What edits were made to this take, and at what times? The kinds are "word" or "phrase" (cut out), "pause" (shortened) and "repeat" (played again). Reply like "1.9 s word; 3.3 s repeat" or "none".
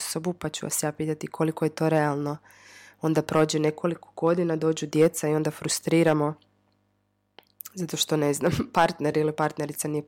none